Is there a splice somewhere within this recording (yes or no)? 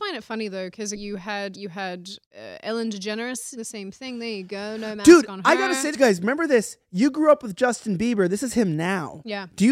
yes